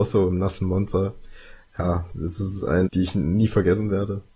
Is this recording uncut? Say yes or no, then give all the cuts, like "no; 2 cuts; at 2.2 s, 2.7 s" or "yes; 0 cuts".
no; 1 cut; at 2.9 s